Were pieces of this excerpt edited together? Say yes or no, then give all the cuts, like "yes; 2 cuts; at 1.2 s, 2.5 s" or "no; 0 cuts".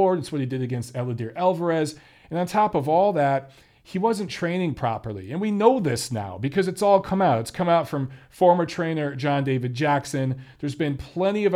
no; 0 cuts